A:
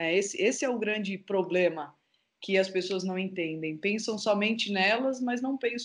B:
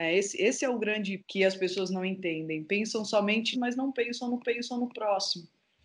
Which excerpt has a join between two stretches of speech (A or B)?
B